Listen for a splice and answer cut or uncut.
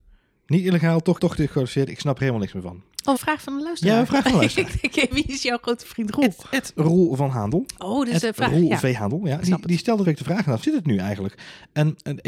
cut